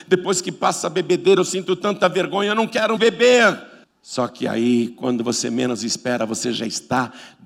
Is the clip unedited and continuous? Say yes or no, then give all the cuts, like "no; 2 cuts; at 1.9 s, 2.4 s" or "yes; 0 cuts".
no; 2 cuts; at 3.0 s, 3.8 s